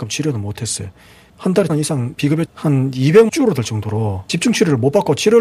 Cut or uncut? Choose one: cut